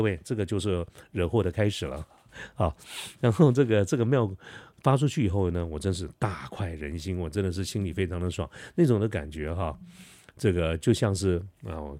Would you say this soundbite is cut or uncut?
uncut